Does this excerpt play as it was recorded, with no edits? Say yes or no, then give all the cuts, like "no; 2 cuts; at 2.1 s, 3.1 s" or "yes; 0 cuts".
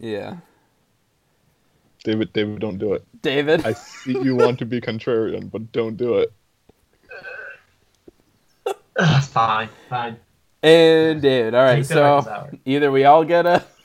yes; 0 cuts